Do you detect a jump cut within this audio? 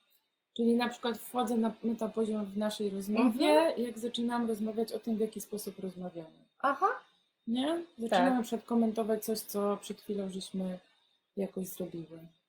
no; 0 cuts

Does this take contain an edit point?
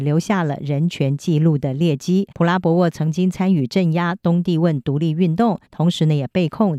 yes; 2 cuts; at 2.3 s, 5.7 s

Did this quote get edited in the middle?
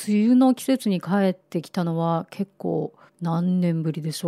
yes; 1 cut; at 3.1 s

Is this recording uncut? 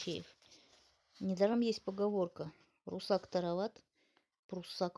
yes; 0 cuts

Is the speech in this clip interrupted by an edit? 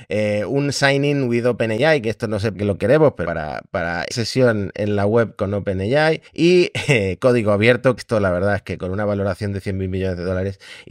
yes; 5 cuts; at 2.5 s, 3.2 s, 4.1 s, 6.3 s, 8.0 s

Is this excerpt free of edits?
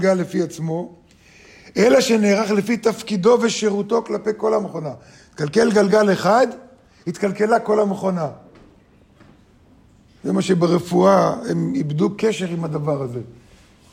yes; 0 cuts

